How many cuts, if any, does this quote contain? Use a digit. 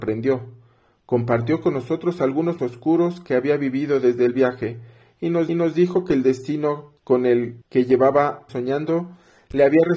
5